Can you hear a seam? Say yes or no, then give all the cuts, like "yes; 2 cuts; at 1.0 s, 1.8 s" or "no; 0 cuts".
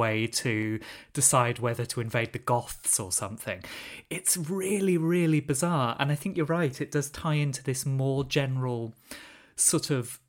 no; 0 cuts